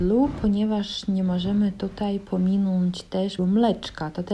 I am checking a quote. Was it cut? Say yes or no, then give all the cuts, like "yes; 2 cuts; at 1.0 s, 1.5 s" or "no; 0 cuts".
yes; 1 cut; at 3.4 s